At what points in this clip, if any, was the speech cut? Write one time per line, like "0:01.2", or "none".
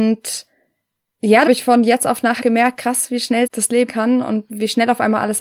0:01.5
0:02.4
0:03.5
0:03.9
0:04.5